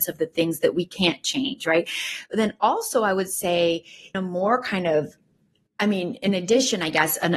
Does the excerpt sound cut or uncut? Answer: cut